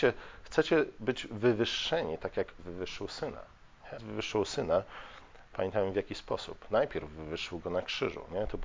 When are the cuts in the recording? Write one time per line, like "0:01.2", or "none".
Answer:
0:02.6
0:04.0